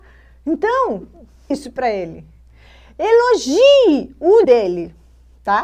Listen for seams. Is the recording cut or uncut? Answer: cut